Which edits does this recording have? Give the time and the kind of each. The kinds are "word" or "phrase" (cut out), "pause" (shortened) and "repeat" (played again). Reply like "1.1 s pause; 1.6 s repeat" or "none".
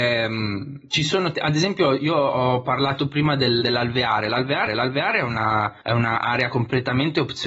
1.3 s word; 3.6 s phrase; 4.7 s repeat; 5.8 s pause

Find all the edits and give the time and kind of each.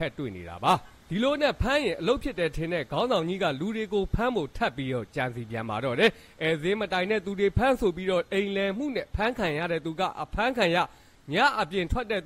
none

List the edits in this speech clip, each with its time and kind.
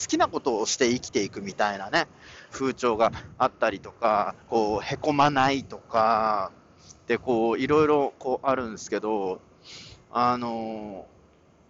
2.5 s phrase; 4.4 s pause; 10.0 s pause

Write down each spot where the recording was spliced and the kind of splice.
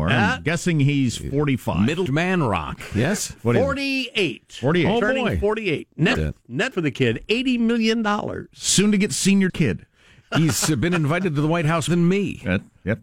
2.1 s word; 6.1 s word; 6.7 s word; 9.5 s word; 11.9 s word

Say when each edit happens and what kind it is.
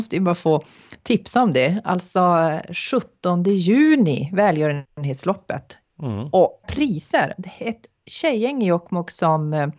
6.6 s word

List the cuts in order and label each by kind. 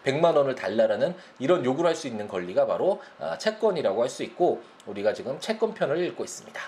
none

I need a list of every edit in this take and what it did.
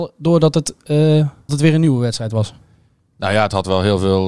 1.5 s word

